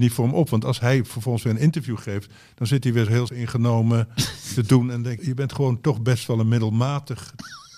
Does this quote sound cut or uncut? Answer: cut